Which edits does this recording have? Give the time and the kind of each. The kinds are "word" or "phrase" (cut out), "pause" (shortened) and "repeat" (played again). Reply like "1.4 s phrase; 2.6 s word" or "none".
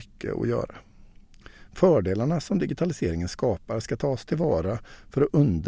none